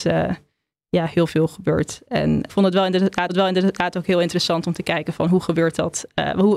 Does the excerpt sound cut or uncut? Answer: cut